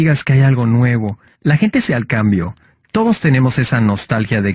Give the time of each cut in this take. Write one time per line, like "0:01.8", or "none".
0:01.3
0:01.9